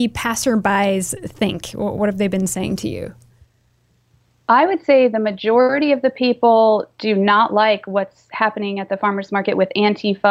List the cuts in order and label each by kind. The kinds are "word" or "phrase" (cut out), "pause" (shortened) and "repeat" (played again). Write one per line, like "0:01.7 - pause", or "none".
none